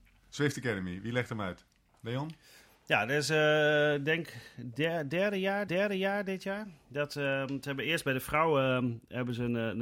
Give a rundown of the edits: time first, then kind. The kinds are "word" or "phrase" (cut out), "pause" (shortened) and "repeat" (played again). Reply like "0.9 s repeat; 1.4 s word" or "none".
5.7 s repeat